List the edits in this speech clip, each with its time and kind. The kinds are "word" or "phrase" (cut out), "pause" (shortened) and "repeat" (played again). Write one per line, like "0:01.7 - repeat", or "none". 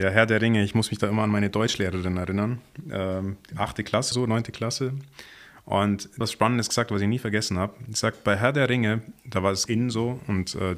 0:04.1 - word
0:06.2 - word
0:09.7 - word